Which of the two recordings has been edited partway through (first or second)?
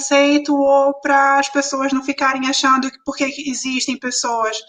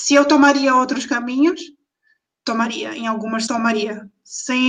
second